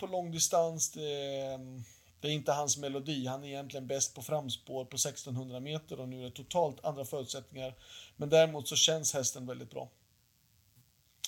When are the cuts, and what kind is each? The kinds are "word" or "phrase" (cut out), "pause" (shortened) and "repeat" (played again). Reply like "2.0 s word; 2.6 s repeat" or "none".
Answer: none

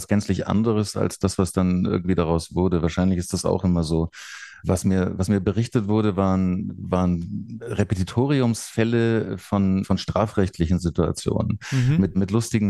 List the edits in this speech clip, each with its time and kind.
none

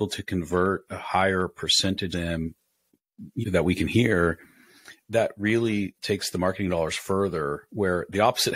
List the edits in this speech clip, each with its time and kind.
2.1 s word; 3.4 s word; 5.0 s word

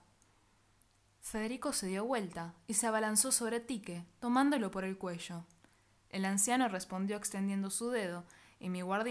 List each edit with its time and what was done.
none

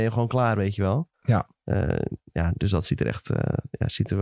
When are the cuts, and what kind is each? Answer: 1.1 s pause

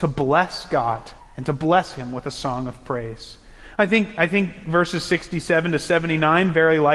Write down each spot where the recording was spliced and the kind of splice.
1.2 s pause

